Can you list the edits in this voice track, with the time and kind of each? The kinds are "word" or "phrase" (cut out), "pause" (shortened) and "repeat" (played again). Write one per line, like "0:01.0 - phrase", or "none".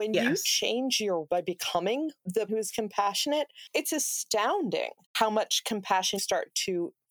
0:01.3 - word
0:02.5 - word
0:05.0 - pause
0:06.2 - word